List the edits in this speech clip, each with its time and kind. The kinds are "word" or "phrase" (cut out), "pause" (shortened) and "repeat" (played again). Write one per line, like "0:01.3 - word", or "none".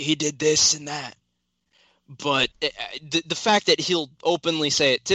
0:02.5 - pause